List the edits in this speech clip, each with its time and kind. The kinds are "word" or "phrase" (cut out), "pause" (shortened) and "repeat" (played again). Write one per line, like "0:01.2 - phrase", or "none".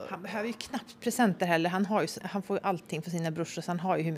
0:02.2 - word